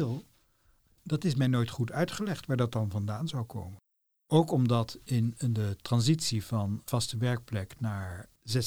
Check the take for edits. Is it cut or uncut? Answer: uncut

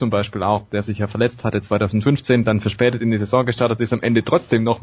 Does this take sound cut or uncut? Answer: uncut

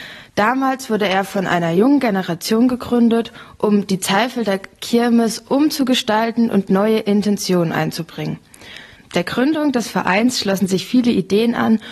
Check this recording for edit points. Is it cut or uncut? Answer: uncut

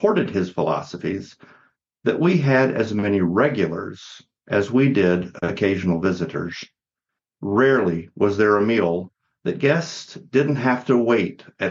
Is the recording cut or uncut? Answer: uncut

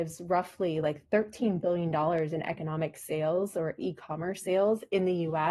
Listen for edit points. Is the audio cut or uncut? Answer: uncut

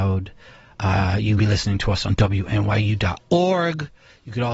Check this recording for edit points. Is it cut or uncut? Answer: cut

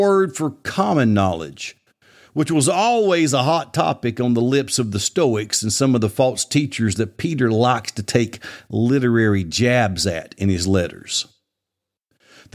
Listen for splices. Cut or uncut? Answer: uncut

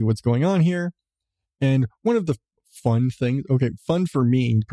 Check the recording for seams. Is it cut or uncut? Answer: uncut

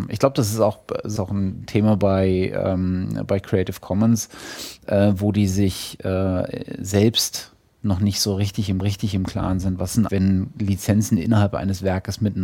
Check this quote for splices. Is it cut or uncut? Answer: cut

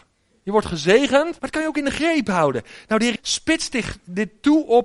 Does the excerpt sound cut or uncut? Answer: cut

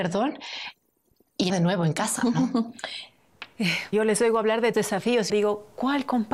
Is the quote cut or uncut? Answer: cut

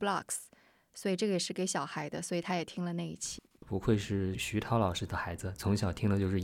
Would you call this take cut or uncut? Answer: uncut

